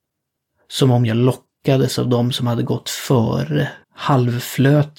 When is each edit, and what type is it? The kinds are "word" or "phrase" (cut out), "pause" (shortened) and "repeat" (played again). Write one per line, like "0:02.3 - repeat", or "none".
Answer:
0:03.8 - pause

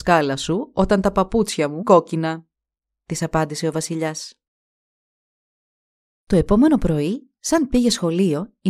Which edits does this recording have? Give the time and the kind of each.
0:01.8 - word

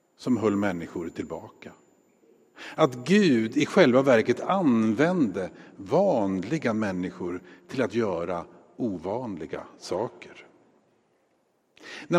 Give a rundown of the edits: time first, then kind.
none

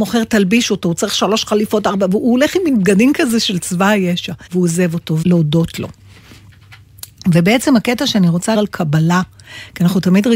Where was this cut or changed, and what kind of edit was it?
0:04.5 - pause
0:05.2 - phrase
0:08.5 - phrase

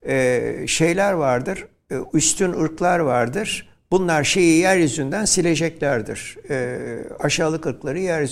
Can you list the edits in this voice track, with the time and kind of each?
none

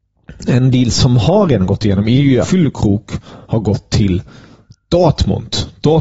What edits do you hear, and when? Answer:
0:02.4 - phrase
0:03.4 - pause

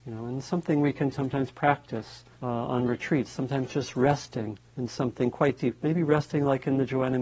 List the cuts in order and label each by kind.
0:02.3 - pause
0:04.7 - pause

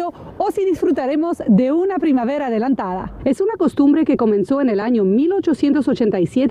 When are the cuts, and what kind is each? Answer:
none

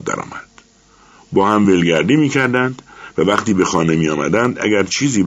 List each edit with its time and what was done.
none

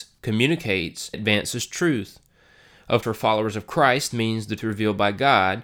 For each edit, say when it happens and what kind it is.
0:01.1 - word
0:03.0 - word
0:04.1 - word
0:04.6 - word

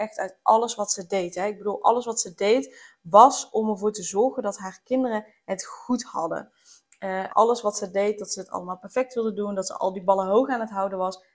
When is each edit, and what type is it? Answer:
0:07.3 - word

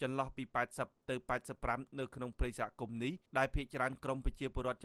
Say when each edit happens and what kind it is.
0:03.3 - pause

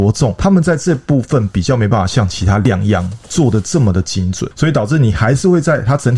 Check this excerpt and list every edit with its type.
0:04.5 - word

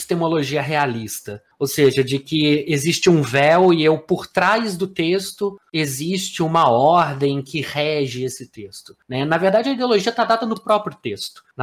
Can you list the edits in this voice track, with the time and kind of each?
none

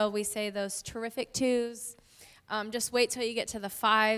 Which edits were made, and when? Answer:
none

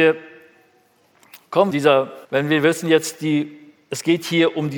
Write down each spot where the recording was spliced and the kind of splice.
0:01.7 - phrase
0:02.2 - pause

